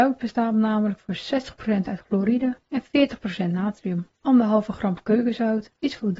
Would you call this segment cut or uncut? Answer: cut